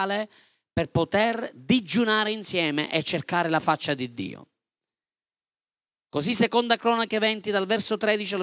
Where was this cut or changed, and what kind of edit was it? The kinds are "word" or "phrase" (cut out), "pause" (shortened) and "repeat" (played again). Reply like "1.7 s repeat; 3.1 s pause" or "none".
none